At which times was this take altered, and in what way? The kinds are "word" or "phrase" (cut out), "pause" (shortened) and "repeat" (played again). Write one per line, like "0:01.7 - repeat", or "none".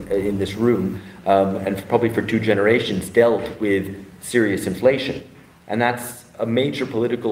none